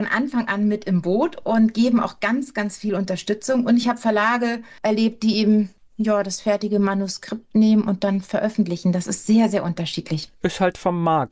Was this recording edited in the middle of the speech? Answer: no; 0 cuts

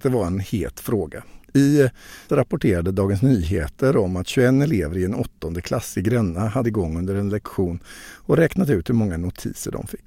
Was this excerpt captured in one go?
no; 2 cuts; at 2.3 s, 6.6 s

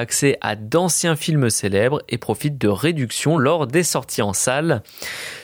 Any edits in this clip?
no; 0 cuts

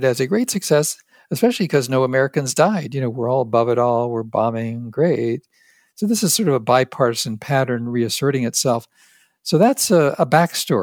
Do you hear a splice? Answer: no; 0 cuts

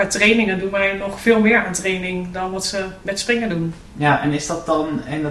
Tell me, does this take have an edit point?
yes; 1 cut; at 3.9 s

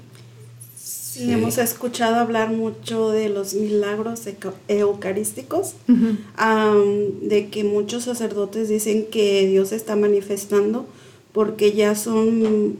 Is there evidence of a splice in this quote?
no; 0 cuts

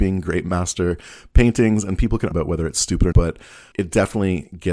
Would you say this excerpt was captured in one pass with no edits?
no; 3 cuts; at 2.3 s, 3.1 s, 3.7 s

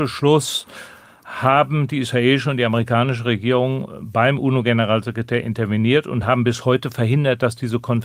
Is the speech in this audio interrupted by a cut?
no; 0 cuts

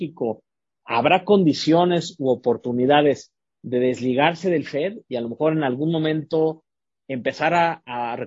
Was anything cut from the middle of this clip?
no; 0 cuts

